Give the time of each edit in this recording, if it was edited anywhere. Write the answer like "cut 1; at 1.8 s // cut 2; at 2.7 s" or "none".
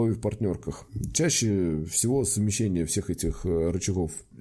none